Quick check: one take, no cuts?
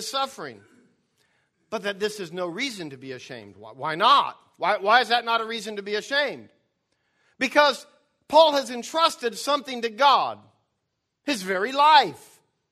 yes; 0 cuts

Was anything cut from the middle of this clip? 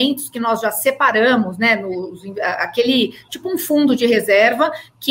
no; 0 cuts

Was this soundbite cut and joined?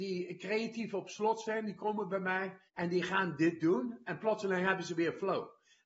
yes; 1 cut; at 2.7 s

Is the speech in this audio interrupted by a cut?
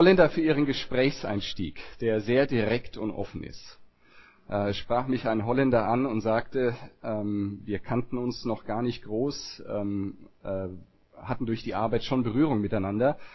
no; 0 cuts

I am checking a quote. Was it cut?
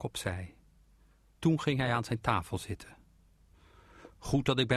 no; 0 cuts

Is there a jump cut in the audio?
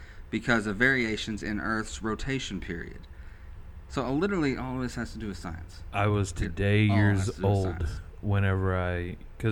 no; 0 cuts

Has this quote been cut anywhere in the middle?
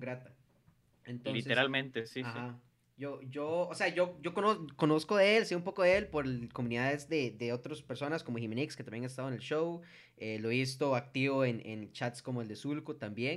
no; 0 cuts

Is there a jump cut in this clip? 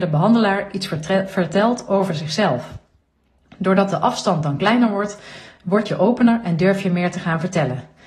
no; 0 cuts

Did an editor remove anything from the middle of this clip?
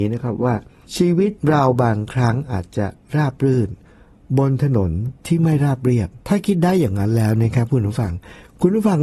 yes; 3 cuts; at 1.4 s, 5.2 s, 6.2 s

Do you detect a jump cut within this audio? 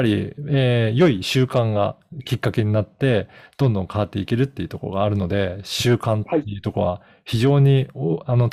no; 0 cuts

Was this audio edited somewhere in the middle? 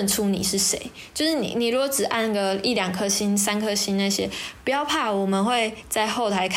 no; 0 cuts

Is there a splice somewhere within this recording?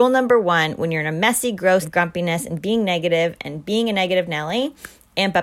yes; 1 cut; at 1.8 s

